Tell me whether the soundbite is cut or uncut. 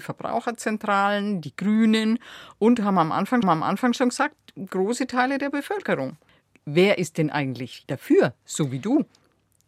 cut